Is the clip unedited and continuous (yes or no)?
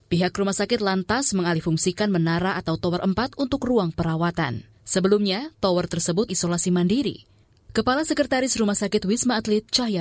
no